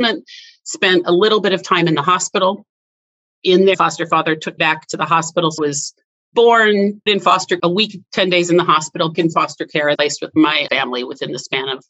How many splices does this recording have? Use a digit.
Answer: 8